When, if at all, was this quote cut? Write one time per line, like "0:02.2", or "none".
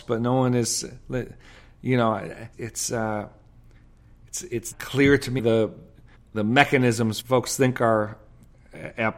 0:02.5
0:04.7
0:05.4
0:06.1
0:07.2